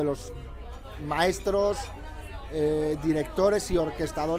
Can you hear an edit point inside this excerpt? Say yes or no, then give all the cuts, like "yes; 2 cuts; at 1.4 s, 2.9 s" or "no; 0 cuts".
no; 0 cuts